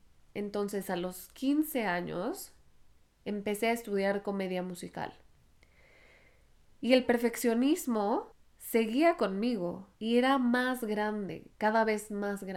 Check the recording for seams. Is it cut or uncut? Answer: cut